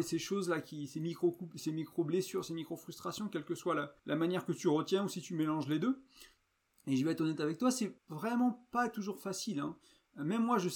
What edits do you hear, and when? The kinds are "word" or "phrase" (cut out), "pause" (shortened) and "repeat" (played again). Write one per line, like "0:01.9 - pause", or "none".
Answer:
0:04.0 - pause
0:06.7 - pause
0:08.0 - pause